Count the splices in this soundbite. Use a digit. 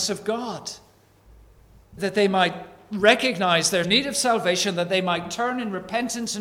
2